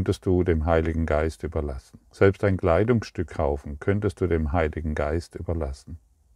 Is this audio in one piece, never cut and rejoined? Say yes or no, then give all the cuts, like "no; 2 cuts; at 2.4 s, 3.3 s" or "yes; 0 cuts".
no; 1 cut; at 2.0 s